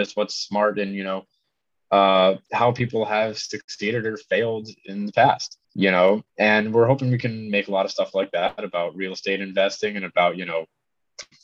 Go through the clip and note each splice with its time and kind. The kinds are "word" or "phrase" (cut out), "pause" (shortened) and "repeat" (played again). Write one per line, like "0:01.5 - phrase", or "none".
0:02.4 - pause
0:05.6 - pause
0:06.3 - pause